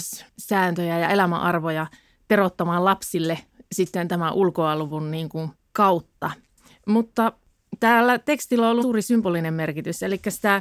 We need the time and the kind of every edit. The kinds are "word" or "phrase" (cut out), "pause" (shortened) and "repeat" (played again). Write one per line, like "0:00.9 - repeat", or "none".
0:05.6 - pause
0:08.8 - word